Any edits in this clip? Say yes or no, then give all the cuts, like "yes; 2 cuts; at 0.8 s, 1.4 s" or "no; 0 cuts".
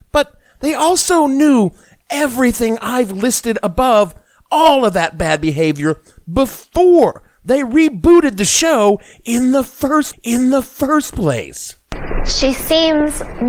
yes; 1 cut; at 10.1 s